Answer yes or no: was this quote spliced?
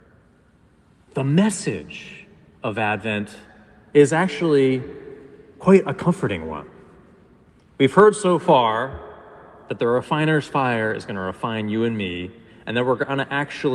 no